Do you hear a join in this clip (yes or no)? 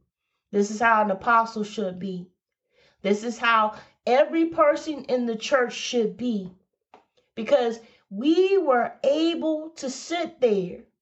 no